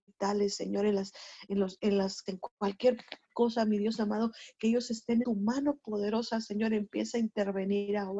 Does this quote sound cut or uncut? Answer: cut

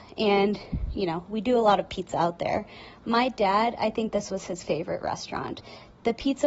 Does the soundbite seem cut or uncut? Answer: uncut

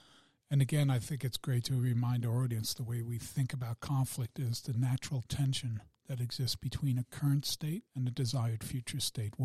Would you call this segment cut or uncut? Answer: cut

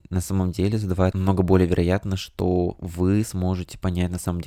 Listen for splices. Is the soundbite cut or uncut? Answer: cut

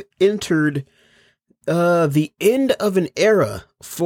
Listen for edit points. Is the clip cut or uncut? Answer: uncut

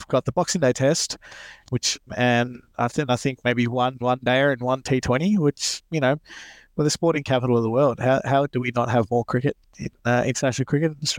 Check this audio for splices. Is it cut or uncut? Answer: cut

